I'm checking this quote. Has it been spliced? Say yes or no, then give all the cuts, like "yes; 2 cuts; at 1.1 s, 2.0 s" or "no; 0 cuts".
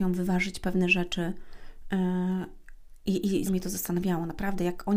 yes; 1 cut; at 3.5 s